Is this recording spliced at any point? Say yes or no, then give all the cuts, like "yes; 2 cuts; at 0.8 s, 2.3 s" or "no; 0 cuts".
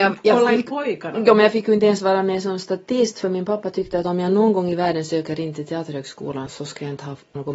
no; 0 cuts